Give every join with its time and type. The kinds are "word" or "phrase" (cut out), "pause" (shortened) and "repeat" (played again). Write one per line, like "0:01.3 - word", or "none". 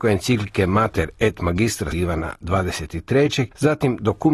0:01.9 - word